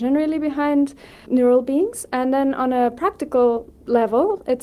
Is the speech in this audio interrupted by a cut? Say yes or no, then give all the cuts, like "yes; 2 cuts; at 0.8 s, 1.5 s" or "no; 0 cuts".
yes; 1 cut; at 1.3 s